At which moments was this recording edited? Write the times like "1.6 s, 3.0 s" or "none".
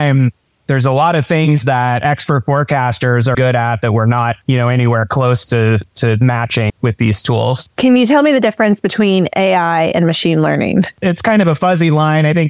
3.3 s, 4.4 s, 6.7 s